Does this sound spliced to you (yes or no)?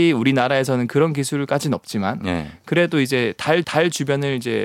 yes